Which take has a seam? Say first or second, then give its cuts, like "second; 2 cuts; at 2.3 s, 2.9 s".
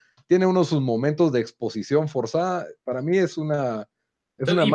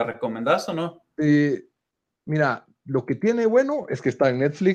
first; 1 cut; at 2.8 s